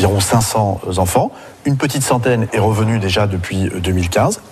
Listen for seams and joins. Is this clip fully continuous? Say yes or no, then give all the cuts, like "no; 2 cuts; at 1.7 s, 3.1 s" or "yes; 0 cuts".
yes; 0 cuts